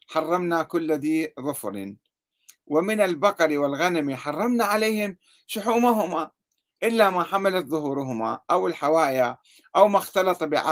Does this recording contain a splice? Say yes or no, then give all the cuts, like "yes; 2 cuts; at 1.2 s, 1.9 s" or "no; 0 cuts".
no; 0 cuts